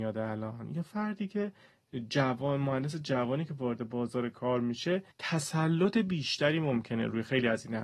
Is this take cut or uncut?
cut